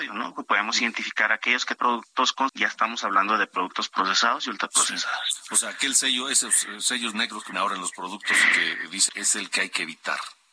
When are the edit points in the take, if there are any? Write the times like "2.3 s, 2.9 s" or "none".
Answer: 1.8 s, 2.5 s, 7.5 s, 9.1 s